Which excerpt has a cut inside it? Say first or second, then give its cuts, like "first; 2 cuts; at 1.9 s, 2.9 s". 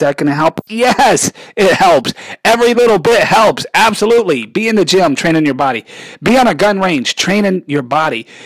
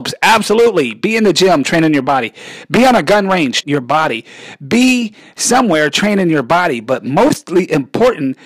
second; 1 cut; at 3.6 s